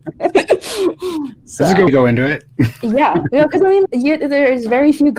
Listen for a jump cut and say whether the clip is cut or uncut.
cut